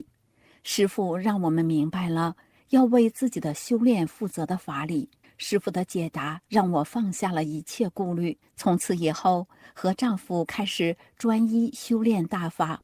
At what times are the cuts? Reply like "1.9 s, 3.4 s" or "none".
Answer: 5.2 s, 6.5 s, 8.4 s